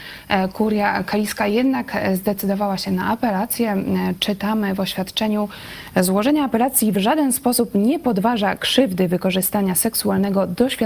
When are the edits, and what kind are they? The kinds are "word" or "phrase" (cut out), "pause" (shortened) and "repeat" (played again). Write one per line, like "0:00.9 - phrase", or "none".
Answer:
none